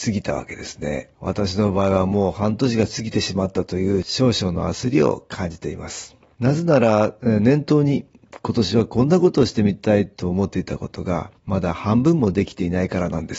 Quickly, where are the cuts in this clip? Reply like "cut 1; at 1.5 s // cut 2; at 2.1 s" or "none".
cut 1; at 1.1 s // cut 2; at 11.4 s